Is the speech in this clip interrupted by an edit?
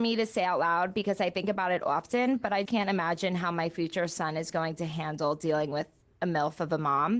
yes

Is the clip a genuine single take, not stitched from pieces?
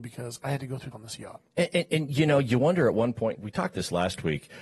no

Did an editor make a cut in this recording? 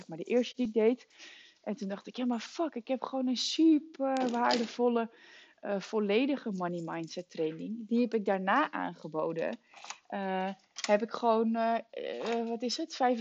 no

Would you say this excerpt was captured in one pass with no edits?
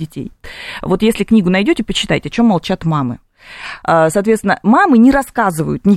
yes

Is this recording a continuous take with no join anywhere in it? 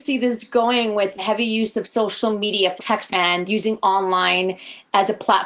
no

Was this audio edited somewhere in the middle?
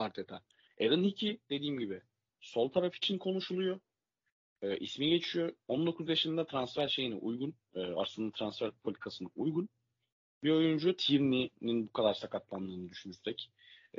no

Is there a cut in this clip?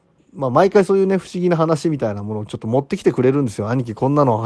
no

